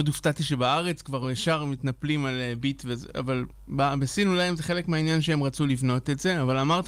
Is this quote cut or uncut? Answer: uncut